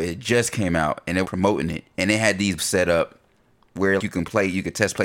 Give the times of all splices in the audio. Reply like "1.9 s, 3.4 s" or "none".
1.2 s, 1.9 s, 2.6 s, 4.0 s